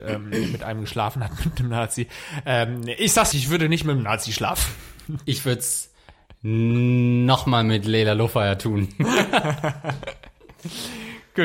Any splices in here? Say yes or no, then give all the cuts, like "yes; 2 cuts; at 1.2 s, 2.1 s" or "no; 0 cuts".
yes; 1 cut; at 3.3 s